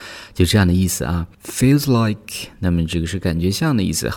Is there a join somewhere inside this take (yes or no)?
no